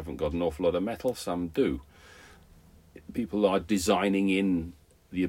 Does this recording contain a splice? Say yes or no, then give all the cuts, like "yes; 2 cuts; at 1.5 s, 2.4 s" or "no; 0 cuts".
no; 0 cuts